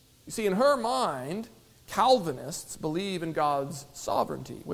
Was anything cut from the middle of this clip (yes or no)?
no